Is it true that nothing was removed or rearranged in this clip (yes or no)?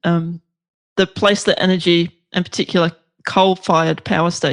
yes